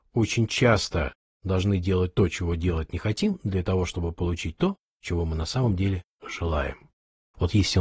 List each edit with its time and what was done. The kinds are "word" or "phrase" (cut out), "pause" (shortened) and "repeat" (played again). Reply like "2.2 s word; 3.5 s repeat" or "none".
none